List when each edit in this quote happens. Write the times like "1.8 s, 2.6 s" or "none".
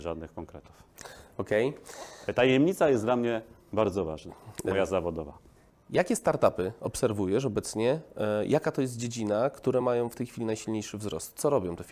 none